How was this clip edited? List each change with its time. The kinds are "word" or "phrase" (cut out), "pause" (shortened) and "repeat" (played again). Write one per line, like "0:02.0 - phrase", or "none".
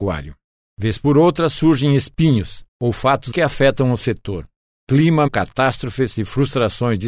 0:02.7 - pause
0:03.3 - word
0:05.3 - word